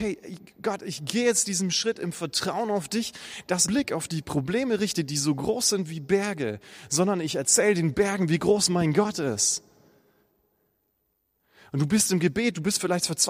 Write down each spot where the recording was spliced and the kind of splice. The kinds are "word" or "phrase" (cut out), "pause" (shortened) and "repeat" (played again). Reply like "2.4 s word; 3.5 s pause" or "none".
3.7 s phrase